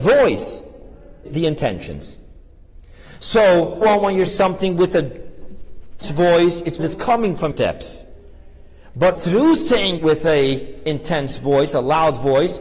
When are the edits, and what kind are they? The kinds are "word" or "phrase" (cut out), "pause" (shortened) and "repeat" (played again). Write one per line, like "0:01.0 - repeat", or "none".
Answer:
0:01.2 - word
0:03.8 - word
0:04.3 - word
0:06.0 - word
0:06.8 - word
0:07.5 - word
0:09.1 - word
0:10.0 - word